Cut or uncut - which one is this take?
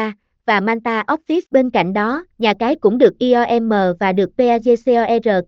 cut